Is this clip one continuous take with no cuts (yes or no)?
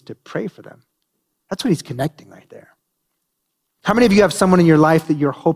yes